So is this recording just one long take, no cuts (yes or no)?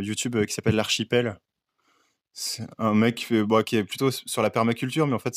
yes